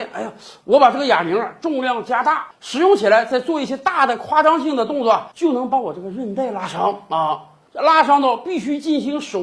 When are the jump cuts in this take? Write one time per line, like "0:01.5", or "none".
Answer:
0:05.3